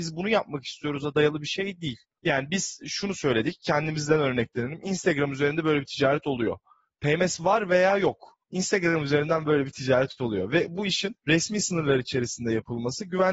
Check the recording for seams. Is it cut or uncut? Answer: cut